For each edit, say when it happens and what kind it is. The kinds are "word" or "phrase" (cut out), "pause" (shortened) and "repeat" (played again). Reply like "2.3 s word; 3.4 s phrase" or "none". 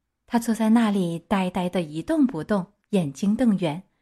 2.8 s pause